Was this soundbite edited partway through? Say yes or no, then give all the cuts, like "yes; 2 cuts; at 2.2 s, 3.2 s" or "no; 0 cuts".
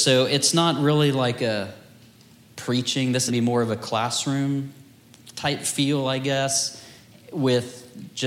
yes; 1 cut; at 3.3 s